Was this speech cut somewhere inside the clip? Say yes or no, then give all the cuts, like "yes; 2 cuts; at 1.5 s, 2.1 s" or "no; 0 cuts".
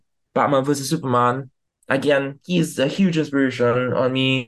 no; 0 cuts